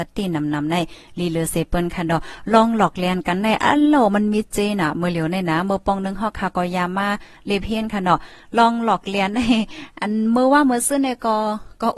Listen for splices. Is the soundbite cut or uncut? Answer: uncut